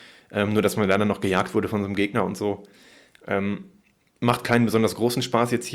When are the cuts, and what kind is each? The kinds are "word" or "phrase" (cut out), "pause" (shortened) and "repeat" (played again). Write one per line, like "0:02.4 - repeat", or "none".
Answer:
none